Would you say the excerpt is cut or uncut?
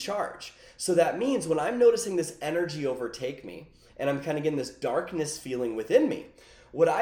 uncut